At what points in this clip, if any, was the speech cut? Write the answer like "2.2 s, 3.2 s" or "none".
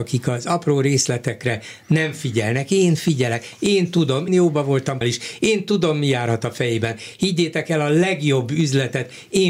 4.3 s, 5.0 s